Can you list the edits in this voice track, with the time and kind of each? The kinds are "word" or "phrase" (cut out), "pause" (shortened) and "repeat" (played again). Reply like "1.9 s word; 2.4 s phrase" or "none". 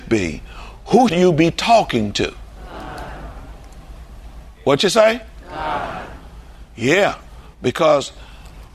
1.1 s word